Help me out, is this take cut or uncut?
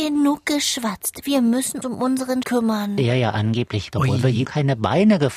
cut